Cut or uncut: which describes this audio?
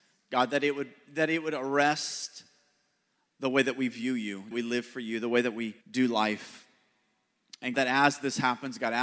cut